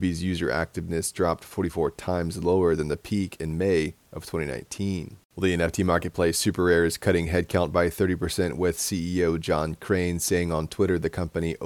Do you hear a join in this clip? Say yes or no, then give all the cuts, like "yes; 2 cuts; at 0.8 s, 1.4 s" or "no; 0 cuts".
yes; 1 cut; at 5.2 s